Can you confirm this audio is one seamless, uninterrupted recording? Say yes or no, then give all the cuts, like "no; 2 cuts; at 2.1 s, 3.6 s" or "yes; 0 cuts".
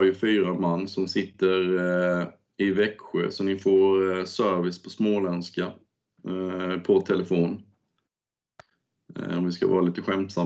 yes; 0 cuts